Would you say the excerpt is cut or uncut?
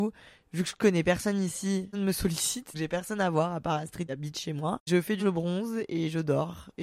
cut